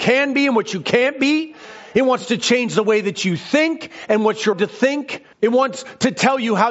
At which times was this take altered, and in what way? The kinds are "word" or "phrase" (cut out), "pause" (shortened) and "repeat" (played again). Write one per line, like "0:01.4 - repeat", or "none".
0:04.5 - word
0:05.3 - pause